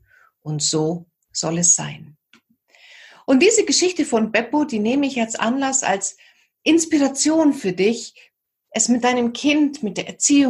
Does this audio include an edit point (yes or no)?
no